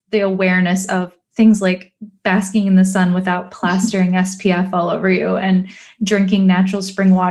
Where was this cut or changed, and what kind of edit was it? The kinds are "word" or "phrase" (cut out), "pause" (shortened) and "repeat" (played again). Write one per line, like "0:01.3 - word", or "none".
none